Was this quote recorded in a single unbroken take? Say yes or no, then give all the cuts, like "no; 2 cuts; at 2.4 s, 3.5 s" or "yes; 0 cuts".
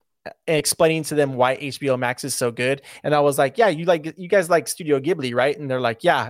yes; 0 cuts